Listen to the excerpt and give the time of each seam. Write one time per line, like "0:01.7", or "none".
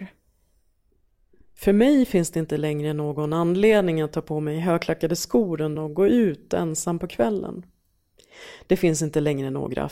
0:05.8